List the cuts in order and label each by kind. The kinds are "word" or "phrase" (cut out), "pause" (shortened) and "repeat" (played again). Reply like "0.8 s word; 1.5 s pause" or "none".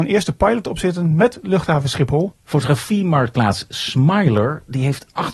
2.4 s pause